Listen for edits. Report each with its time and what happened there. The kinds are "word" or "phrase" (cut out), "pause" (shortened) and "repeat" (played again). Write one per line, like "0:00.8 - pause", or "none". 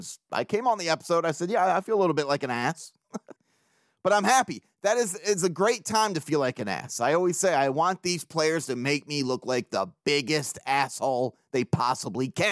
0:03.4 - pause